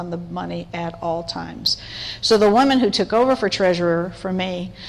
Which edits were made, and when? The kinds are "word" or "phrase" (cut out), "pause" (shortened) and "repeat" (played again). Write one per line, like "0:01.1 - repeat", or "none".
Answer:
none